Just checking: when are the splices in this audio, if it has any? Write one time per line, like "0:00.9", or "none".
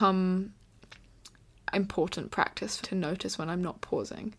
0:01.7
0:02.8